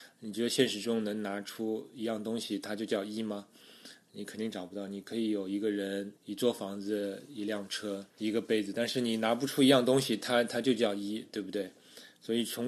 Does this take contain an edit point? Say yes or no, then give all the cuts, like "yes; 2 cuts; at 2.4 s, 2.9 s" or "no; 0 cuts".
yes; 2 cuts; at 6.2 s, 8.1 s